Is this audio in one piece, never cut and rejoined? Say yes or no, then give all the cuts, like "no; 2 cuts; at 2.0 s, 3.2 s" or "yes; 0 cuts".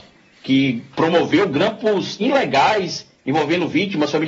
yes; 0 cuts